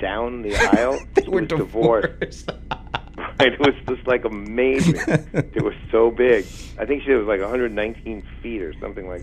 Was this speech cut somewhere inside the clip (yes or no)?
no